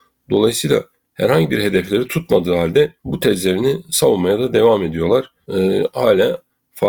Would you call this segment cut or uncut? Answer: cut